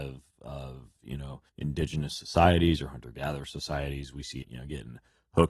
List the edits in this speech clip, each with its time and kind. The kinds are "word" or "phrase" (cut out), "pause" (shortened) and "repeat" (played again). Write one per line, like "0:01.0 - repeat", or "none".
0:01.5 - pause
0:04.4 - phrase